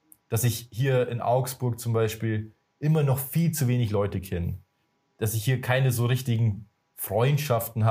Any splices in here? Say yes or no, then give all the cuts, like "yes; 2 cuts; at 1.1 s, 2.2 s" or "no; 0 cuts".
no; 0 cuts